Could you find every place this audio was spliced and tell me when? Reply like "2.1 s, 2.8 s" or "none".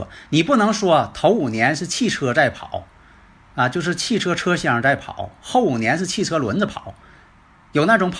none